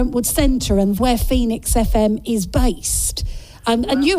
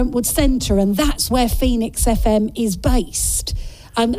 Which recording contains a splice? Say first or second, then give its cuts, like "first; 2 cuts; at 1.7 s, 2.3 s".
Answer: first; 1 cut; at 1.0 s